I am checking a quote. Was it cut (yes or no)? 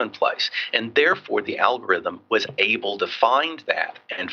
no